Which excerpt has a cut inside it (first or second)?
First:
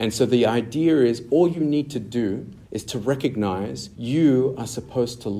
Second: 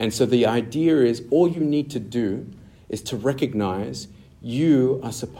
first